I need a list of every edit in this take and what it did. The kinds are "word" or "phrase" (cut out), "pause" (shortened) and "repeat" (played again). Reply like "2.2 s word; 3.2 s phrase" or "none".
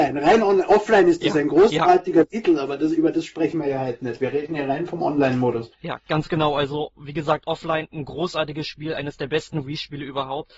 5.7 s pause